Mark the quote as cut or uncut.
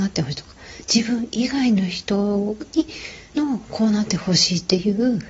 cut